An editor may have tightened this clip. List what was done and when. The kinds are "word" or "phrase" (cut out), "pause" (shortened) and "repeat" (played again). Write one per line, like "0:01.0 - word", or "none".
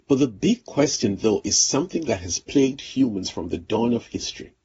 none

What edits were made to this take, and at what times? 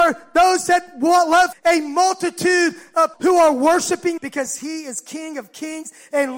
0:01.5 - word
0:03.1 - word
0:04.2 - word

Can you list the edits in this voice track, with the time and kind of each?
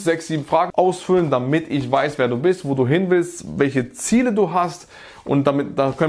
none

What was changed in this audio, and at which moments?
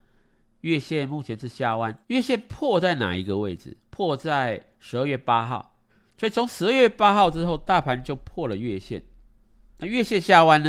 0:02.0 - pause
0:03.8 - pause
0:04.7 - pause
0:05.9 - pause

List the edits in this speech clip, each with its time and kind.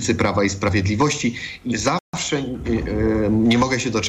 0:01.7 - word

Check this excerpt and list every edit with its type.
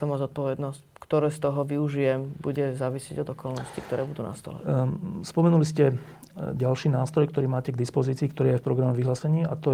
none

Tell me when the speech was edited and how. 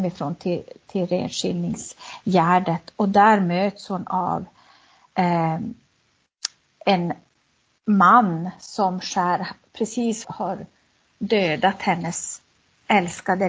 0:10.2 - word

